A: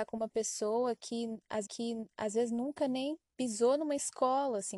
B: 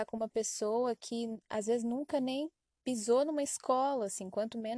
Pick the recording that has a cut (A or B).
A